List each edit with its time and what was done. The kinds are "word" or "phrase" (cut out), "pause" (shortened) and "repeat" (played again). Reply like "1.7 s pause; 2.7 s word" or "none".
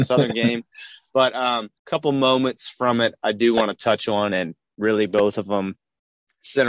1.8 s pause